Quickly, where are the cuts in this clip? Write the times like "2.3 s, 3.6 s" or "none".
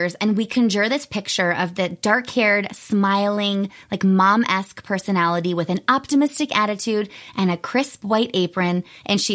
none